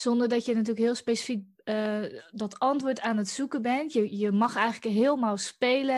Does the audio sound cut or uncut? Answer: uncut